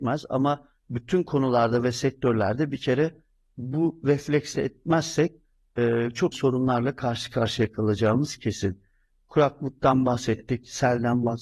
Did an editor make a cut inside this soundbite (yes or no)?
yes